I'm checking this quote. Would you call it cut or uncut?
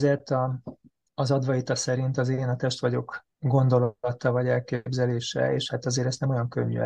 cut